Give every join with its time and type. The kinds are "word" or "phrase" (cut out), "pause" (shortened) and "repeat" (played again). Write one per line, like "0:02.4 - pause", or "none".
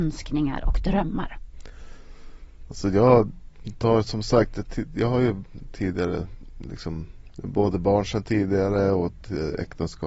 none